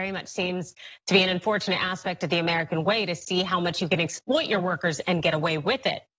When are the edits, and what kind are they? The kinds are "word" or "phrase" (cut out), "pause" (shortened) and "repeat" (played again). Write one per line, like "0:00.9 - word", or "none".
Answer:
none